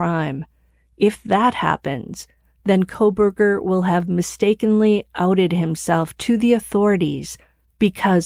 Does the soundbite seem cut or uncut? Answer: uncut